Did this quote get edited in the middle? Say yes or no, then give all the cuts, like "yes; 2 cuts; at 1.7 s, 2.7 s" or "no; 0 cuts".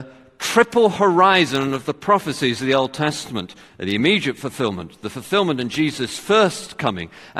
no; 0 cuts